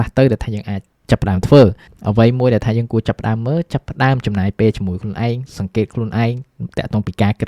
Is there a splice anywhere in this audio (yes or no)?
no